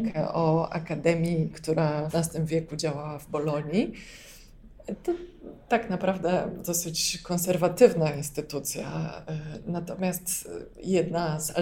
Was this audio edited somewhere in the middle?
yes; 2 cuts; at 1.5 s, 2.1 s

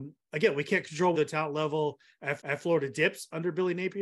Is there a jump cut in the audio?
yes; 2 cuts; at 1.1 s, 2.4 s

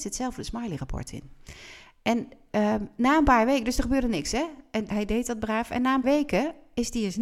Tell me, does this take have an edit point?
yes; 2 cuts; at 4.9 s, 6.0 s

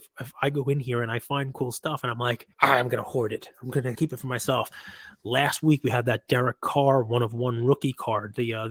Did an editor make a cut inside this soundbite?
yes; 2 cuts; at 2.5 s, 3.9 s

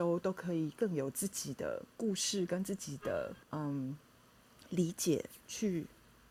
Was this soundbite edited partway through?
yes; 2 cuts; at 1.9 s, 3.4 s

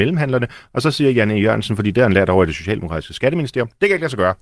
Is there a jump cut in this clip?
no; 0 cuts

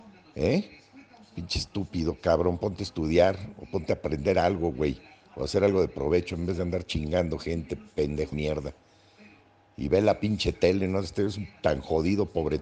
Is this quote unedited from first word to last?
no; 1 cut; at 8.3 s

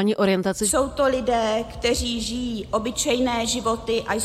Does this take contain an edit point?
no; 0 cuts

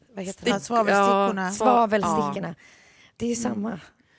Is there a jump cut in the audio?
no; 0 cuts

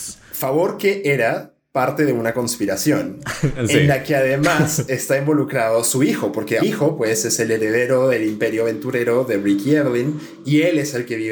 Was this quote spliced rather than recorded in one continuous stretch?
yes; 1 cut; at 6.6 s

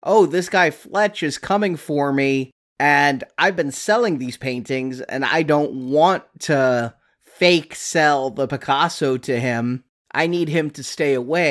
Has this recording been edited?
no; 0 cuts

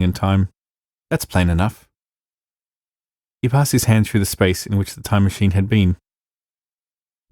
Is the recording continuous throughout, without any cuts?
yes; 0 cuts

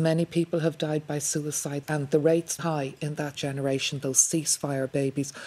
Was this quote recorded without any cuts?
no; 3 cuts; at 1.8 s, 2.6 s, 3.3 s

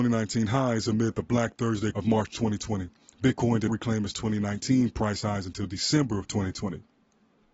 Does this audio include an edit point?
yes; 2 cuts; at 1.9 s, 3.7 s

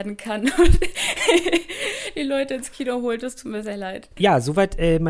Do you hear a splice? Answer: no; 0 cuts

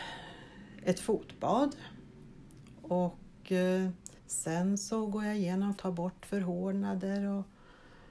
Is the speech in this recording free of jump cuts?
no; 2 cuts; at 4.2 s, 5.8 s

